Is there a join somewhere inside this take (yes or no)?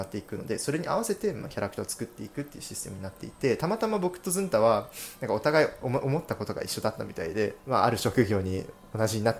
yes